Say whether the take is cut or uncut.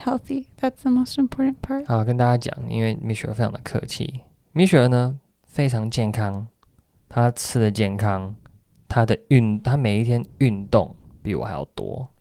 uncut